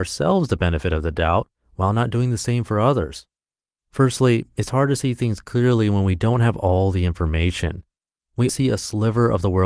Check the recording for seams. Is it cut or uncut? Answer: cut